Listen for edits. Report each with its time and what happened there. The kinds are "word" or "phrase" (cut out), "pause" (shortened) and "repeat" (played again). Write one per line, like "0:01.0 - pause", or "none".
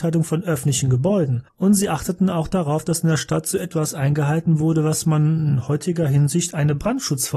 0:01.5 - pause